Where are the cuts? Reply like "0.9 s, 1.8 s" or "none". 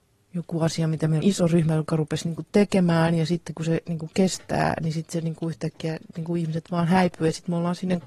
1.2 s